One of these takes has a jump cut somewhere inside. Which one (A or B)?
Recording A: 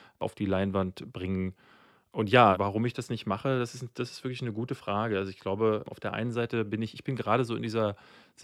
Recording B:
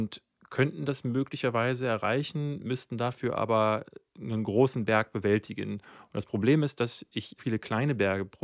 B